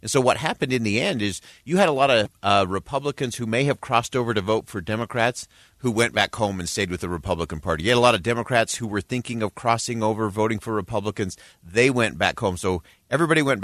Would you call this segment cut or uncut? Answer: uncut